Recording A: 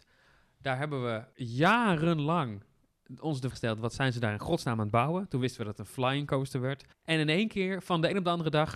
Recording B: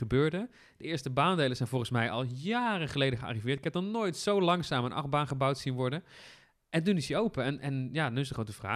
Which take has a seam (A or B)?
A